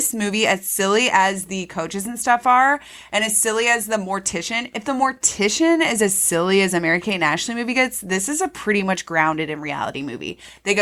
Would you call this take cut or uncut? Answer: uncut